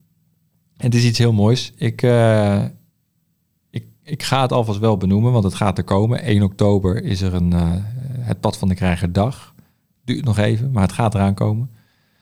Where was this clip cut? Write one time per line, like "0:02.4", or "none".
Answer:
none